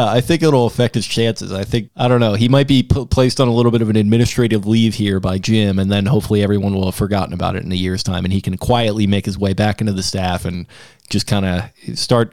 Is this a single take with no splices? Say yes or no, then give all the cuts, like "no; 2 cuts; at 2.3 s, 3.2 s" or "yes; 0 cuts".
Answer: no; 1 cut; at 1.9 s